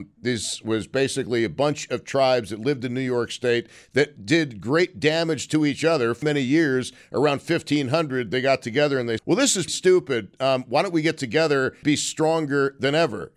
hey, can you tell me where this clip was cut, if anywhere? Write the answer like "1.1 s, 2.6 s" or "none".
6.2 s, 9.2 s, 9.7 s, 11.8 s